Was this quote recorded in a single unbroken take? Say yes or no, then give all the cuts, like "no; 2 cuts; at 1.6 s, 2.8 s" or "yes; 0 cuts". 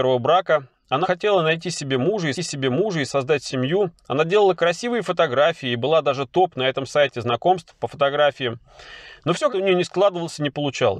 no; 3 cuts; at 1.0 s, 2.3 s, 9.5 s